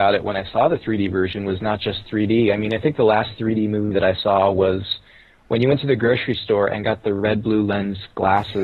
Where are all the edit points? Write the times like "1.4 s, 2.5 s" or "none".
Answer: none